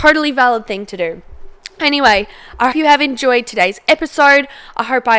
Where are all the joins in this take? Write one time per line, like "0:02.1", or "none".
0:02.7